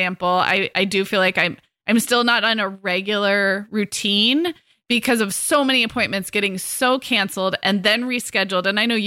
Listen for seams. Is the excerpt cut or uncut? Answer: uncut